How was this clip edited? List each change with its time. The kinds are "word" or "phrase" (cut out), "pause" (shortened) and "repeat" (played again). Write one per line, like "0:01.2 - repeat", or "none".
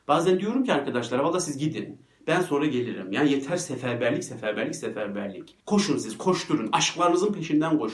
0:05.6 - pause